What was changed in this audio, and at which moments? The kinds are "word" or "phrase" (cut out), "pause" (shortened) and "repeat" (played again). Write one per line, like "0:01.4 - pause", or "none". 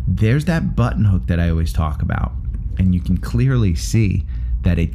none